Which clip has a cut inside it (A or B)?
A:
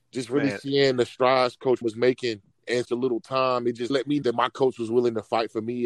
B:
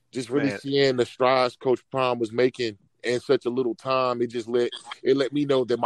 A